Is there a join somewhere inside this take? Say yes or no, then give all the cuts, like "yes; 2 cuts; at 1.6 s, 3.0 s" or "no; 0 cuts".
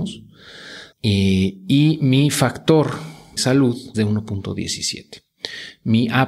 yes; 3 cuts; at 0.9 s, 3.4 s, 3.9 s